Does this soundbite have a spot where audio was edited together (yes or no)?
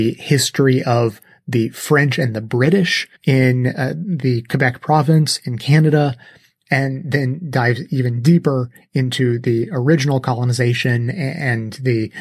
yes